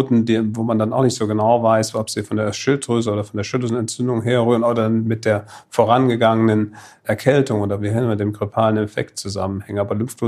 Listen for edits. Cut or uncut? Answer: uncut